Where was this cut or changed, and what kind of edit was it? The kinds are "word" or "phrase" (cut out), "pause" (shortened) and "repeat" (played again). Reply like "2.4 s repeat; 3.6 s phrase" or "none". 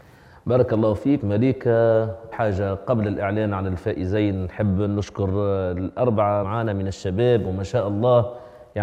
1.2 s word; 2.3 s word; 6.4 s word